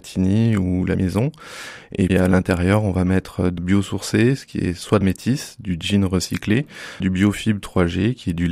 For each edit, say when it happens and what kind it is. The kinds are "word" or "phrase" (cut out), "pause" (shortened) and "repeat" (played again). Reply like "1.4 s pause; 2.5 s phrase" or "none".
0.9 s word; 2.1 s word; 3.6 s word; 5.0 s word; 7.0 s word